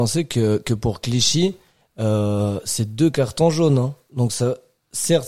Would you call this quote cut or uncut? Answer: uncut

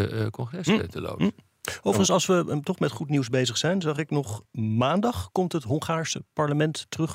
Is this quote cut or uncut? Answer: uncut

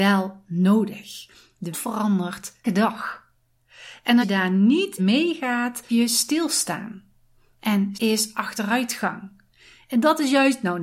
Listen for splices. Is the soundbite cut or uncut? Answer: cut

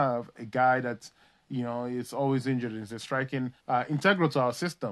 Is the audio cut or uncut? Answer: cut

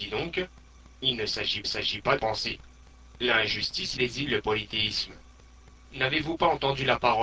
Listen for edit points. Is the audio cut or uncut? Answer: cut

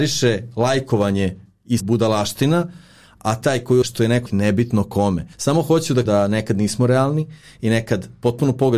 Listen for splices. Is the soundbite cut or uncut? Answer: cut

